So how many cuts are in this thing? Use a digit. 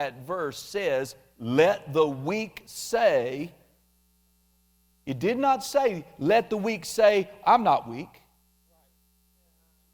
0